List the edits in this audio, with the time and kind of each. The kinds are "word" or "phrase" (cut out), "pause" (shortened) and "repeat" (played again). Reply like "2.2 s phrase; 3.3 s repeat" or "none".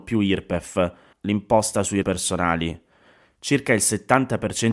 1.1 s word; 2.0 s word